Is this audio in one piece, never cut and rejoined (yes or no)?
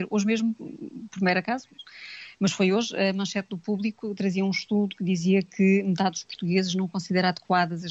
yes